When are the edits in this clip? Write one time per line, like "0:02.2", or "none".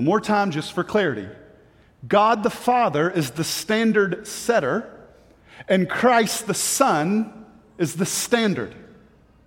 none